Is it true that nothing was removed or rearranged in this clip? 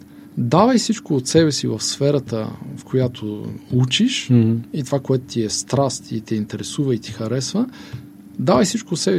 yes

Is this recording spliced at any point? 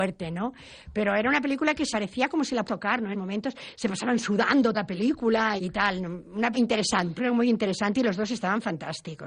yes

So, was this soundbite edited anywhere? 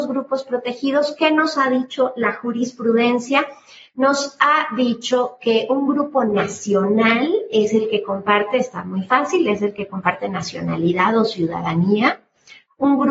no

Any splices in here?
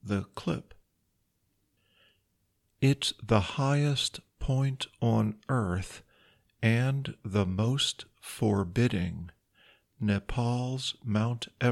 no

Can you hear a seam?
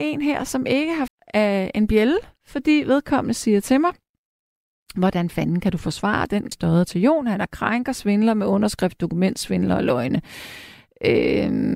yes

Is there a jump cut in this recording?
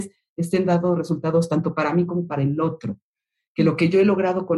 no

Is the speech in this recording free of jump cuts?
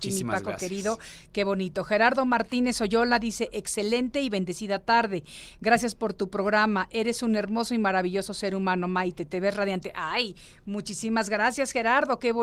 yes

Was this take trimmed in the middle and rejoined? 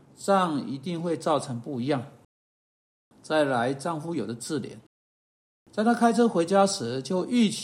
no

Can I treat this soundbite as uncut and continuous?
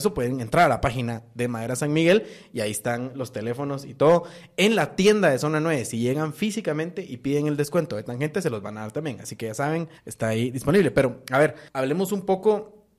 no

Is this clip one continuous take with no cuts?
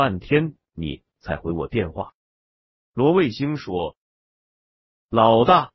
no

